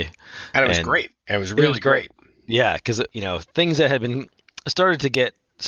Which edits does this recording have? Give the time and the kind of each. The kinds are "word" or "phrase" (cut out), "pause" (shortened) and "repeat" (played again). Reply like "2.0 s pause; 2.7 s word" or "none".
3.1 s word